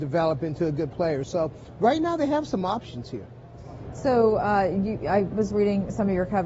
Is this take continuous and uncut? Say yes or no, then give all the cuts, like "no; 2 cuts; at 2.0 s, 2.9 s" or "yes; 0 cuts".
yes; 0 cuts